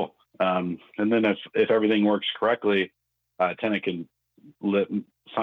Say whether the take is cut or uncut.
uncut